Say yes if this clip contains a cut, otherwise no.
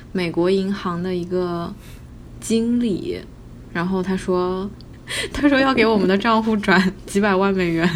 no